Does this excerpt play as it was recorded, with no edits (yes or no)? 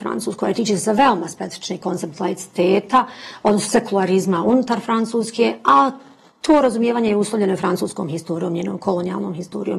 yes